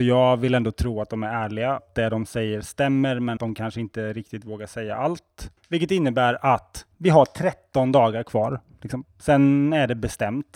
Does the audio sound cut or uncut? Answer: cut